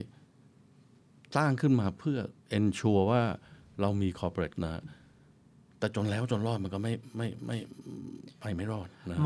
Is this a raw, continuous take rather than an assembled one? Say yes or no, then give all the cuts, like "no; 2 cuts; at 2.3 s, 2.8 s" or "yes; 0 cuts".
no; 2 cuts; at 2.4 s, 4.5 s